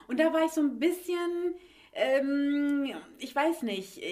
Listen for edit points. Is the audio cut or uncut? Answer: uncut